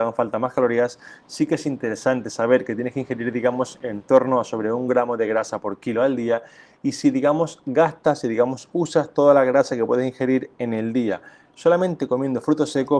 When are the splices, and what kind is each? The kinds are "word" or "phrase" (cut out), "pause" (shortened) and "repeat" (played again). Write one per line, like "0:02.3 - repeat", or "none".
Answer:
none